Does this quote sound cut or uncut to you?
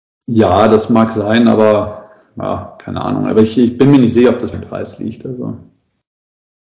cut